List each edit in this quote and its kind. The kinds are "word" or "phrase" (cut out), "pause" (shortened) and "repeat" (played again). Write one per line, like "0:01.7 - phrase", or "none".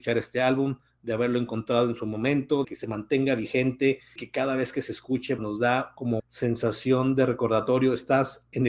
0:02.6 - word
0:04.2 - word
0:05.4 - word
0:06.2 - word